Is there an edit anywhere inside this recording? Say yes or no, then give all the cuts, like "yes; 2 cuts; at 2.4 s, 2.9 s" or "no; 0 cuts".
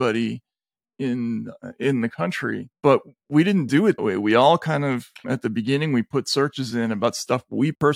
yes; 3 cuts; at 2.7 s, 4.0 s, 5.2 s